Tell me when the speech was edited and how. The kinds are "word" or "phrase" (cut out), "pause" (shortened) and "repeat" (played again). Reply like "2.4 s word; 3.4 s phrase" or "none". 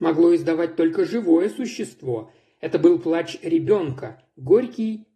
none